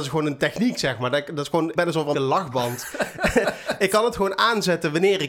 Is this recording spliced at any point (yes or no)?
yes